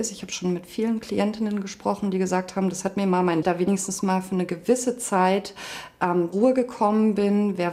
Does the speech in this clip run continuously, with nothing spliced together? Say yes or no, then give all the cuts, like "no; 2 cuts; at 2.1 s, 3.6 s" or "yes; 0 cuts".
no; 2 cuts; at 3.4 s, 6.3 s